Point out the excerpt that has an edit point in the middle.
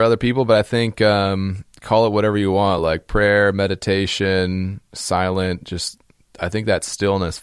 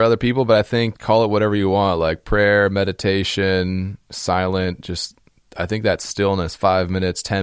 second; 1 cut; at 1.0 s

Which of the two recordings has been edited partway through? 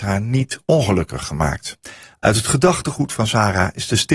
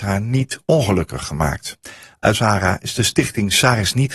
second; 1 cut; at 2.3 s

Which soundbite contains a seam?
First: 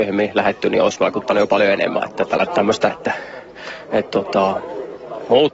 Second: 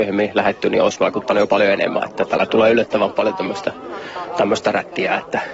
first; 2 cuts; at 2.5 s, 2.9 s

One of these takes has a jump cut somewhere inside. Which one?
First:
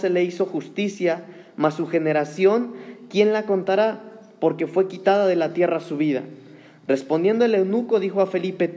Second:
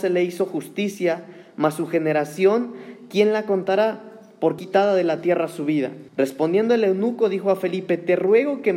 second; 2 cuts; at 4.6 s, 6.1 s

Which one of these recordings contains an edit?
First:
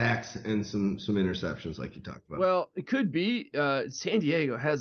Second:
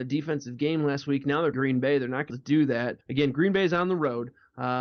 second; 3 cuts; at 1.5 s, 2.3 s, 3.0 s

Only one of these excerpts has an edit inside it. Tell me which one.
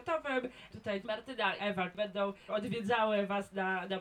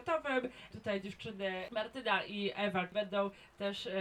first; 3 cuts; at 1.0 s, 1.6 s, 2.5 s

